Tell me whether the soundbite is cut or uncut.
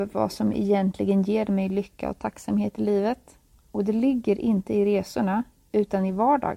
uncut